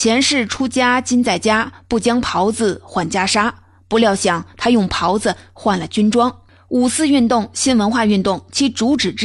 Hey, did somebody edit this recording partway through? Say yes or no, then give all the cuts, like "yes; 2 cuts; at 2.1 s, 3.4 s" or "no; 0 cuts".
no; 0 cuts